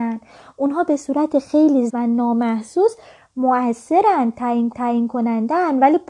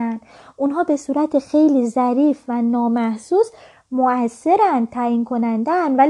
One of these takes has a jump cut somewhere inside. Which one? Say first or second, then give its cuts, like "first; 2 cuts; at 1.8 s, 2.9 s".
first; 2 cuts; at 1.9 s, 4.7 s